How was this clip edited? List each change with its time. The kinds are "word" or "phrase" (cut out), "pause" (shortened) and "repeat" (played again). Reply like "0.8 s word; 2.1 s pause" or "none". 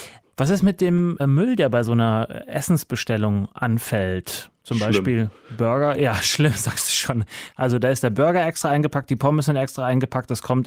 1.2 s word